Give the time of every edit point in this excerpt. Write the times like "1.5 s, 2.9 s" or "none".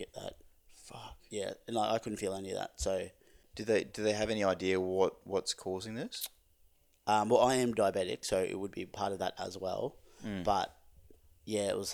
none